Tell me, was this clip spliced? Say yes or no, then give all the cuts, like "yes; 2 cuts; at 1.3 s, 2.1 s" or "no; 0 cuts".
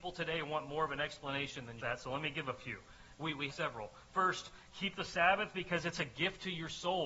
yes; 2 cuts; at 1.8 s, 3.5 s